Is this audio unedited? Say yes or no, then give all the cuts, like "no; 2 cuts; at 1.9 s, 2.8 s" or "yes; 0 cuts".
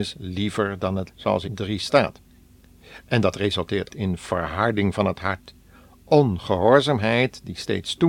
no; 3 cuts; at 1.1 s, 1.4 s, 3.9 s